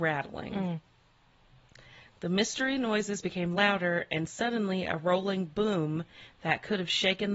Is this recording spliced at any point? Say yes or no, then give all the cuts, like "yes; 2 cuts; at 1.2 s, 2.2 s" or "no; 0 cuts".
no; 0 cuts